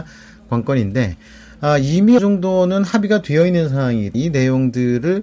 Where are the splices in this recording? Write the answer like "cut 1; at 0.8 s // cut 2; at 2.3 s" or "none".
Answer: cut 1; at 2.2 s // cut 2; at 4.1 s